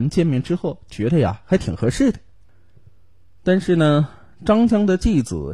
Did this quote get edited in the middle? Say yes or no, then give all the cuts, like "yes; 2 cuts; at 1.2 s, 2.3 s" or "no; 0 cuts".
no; 0 cuts